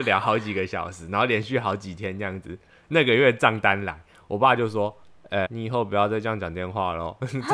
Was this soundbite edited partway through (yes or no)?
yes